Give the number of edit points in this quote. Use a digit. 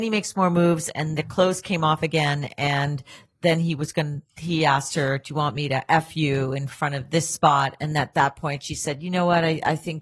0